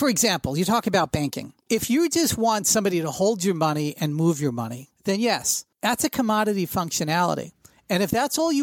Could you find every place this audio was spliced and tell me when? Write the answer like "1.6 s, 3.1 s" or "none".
1.6 s, 4.9 s, 5.7 s